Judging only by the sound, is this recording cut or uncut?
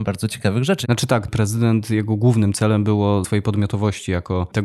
cut